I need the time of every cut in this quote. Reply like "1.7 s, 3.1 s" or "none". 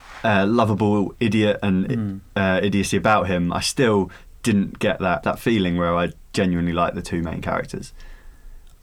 none